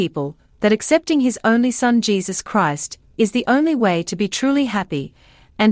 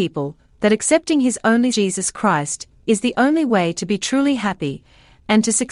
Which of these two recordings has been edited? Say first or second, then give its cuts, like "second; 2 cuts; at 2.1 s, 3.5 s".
second; 1 cut; at 1.7 s